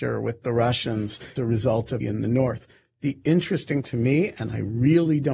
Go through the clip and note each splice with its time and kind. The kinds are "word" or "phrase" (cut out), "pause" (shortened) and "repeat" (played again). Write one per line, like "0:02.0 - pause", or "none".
0:01.4 - word
0:02.0 - word
0:03.8 - word